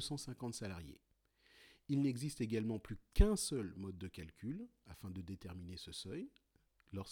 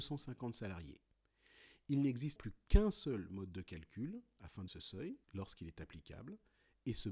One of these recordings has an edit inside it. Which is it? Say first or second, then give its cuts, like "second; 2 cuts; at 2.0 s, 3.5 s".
second; 3 cuts; at 2.4 s, 4.7 s, 5.2 s